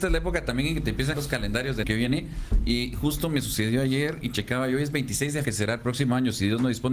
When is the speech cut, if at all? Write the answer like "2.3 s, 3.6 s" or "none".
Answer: 1.1 s, 1.8 s, 5.4 s